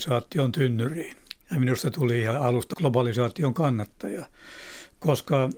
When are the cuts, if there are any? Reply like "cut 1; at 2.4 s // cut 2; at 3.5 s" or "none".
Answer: cut 1; at 1.4 s // cut 2; at 2.7 s